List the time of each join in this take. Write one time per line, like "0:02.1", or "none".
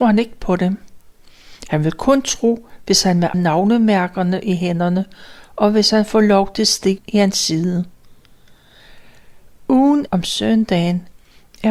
0:03.3
0:07.0
0:10.1